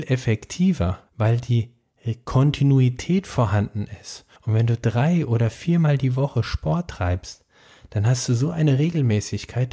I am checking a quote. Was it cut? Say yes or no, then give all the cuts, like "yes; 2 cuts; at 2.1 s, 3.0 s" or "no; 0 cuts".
yes; 2 cuts; at 1.1 s, 4.3 s